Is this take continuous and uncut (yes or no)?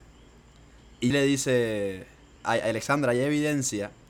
no